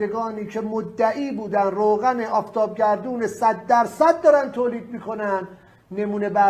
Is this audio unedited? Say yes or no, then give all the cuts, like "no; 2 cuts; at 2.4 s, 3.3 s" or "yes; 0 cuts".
yes; 0 cuts